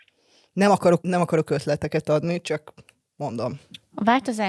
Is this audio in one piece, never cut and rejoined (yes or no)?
no